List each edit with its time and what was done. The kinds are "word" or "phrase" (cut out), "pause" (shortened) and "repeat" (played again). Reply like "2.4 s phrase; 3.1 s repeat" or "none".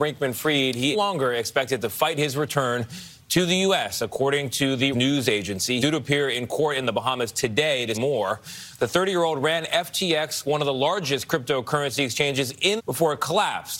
0.9 s phrase; 4.9 s word; 5.8 s word; 7.9 s word; 12.8 s phrase